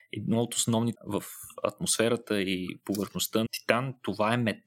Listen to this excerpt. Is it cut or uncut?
cut